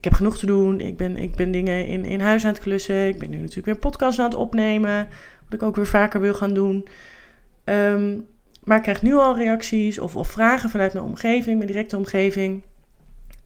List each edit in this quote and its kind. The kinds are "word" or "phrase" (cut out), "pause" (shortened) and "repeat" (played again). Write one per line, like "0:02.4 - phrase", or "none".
none